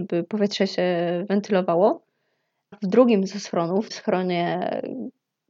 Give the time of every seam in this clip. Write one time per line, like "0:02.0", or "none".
0:02.7
0:03.9